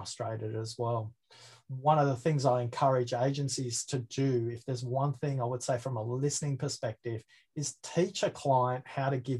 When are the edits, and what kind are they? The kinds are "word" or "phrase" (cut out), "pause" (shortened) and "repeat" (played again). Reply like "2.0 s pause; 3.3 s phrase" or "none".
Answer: none